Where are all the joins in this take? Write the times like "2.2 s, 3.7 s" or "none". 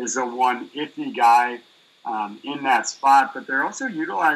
none